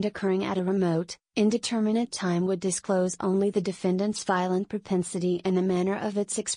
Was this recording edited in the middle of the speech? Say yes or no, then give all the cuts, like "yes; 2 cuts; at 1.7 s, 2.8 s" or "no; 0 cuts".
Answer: no; 0 cuts